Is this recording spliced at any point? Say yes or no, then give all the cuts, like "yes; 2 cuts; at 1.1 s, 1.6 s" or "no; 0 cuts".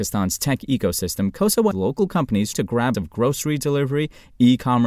yes; 3 cuts; at 1.7 s, 2.5 s, 2.9 s